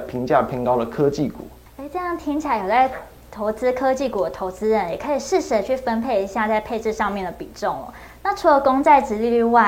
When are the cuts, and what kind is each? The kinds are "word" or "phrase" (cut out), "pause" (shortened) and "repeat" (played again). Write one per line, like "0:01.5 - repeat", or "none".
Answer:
0:01.7 - pause